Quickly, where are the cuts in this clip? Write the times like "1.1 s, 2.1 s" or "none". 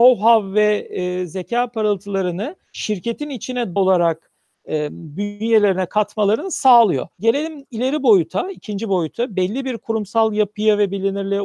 2.7 s, 3.8 s, 7.1 s